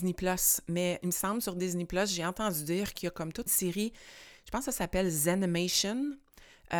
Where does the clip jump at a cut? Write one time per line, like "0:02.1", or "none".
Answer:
0:01.0
0:03.5